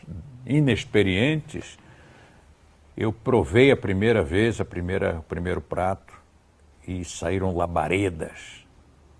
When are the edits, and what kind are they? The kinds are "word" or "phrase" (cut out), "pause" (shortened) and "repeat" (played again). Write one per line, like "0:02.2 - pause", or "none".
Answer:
none